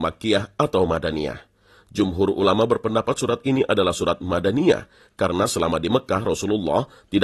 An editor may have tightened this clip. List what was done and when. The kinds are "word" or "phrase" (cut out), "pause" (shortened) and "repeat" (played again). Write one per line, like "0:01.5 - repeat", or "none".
none